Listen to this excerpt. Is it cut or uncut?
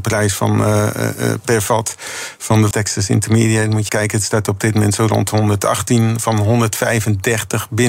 cut